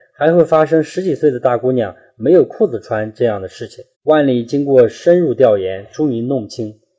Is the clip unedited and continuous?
no; 1 cut; at 3.9 s

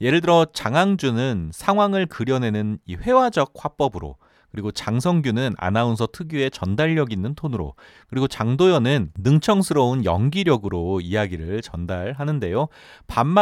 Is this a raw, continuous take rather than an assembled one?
yes; 0 cuts

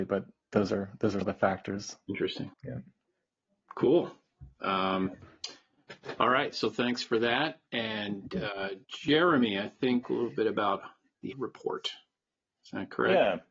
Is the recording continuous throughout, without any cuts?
no; 5 cuts; at 1.2 s, 2.5 s, 8.8 s, 10.0 s, 11.3 s

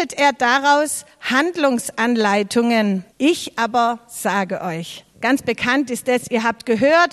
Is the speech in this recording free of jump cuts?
no; 2 cuts; at 3.1 s, 5.1 s

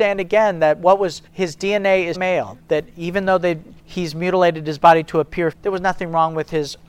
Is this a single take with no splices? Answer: no; 4 cuts; at 1.3 s, 2.1 s, 3.8 s, 5.5 s

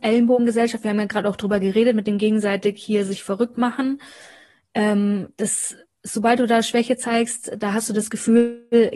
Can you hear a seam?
no; 0 cuts

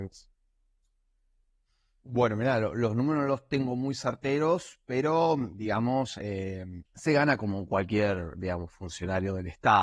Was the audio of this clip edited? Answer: yes; 1 cut; at 6.9 s

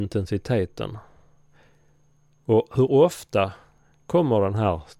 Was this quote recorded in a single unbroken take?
yes; 0 cuts

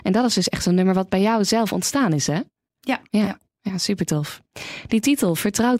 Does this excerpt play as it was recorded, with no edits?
no; 1 cut; at 3.1 s

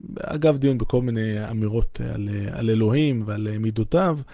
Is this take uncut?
yes; 0 cuts

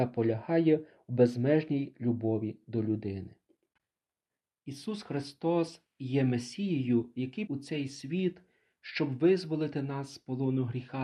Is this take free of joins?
no; 1 cut; at 7.5 s

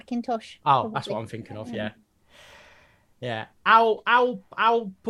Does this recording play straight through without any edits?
yes; 0 cuts

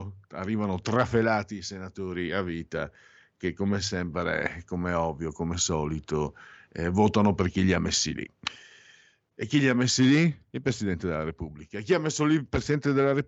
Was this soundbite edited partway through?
no; 0 cuts

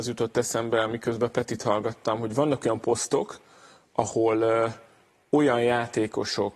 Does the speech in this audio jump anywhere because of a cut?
no; 0 cuts

